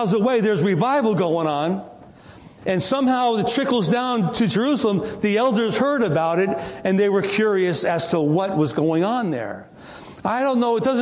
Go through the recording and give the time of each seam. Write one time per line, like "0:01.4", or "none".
none